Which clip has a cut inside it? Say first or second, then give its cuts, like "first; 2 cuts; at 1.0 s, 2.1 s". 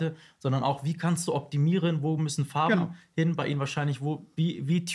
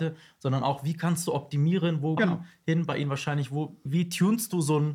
second; 2 cuts; at 2.2 s, 3.8 s